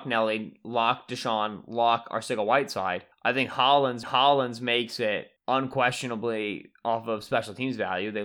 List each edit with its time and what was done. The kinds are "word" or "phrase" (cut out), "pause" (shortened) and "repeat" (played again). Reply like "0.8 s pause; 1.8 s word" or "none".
3.1 s pause; 4.0 s repeat; 5.4 s pause